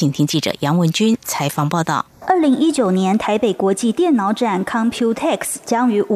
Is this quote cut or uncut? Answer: cut